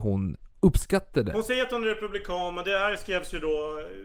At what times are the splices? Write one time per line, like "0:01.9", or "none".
none